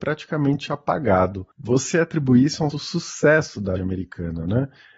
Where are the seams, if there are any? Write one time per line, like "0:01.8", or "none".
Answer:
0:01.5
0:02.7
0:03.8